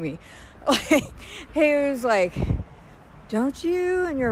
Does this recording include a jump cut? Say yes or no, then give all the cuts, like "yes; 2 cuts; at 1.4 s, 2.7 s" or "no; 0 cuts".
yes; 1 cut; at 1.5 s